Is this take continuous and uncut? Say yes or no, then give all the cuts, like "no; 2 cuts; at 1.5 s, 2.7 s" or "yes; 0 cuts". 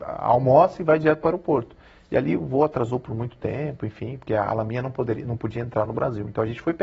yes; 0 cuts